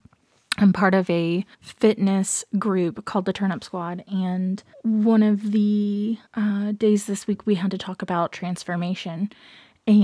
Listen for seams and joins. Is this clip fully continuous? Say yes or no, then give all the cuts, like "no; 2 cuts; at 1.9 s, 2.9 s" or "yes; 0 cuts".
no; 3 cuts; at 1.5 s, 4.7 s, 6.3 s